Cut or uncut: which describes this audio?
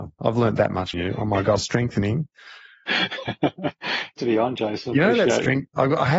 cut